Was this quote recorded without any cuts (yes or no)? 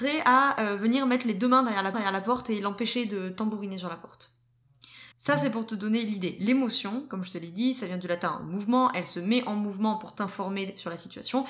no